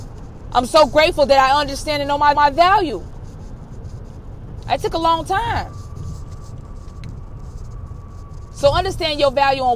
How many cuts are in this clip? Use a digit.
1